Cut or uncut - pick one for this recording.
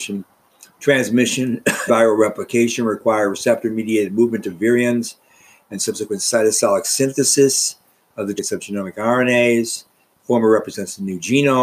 cut